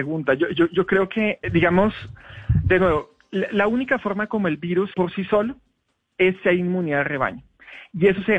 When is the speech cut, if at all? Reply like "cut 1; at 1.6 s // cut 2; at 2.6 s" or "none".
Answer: cut 1; at 1.4 s // cut 2; at 4.9 s